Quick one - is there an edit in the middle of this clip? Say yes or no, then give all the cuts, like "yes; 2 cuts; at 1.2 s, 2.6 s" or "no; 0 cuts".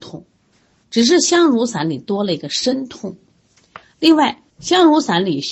yes; 1 cut; at 4.5 s